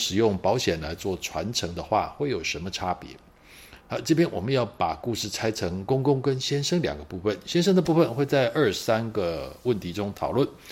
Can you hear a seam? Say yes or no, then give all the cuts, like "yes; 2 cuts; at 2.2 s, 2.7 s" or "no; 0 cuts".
yes; 1 cut; at 3.8 s